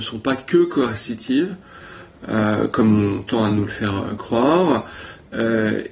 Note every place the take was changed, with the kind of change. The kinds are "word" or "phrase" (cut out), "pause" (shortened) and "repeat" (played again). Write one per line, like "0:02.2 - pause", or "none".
none